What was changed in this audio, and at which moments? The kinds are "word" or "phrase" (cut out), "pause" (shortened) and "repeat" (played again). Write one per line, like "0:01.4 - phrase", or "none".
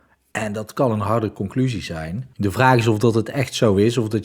0:02.3 - pause